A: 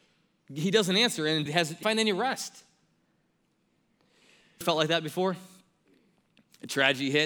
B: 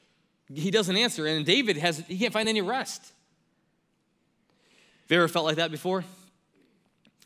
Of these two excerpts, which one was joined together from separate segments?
A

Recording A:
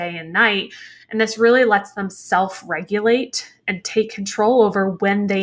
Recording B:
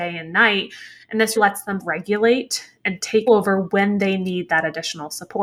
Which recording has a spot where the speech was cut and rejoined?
B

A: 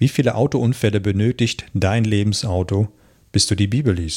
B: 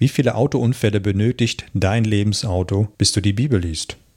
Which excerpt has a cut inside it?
B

